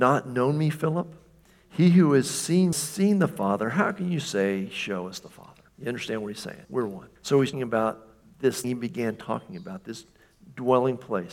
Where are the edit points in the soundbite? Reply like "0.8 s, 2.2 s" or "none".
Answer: 2.7 s, 5.7 s, 6.6 s, 7.2 s, 7.5 s, 8.6 s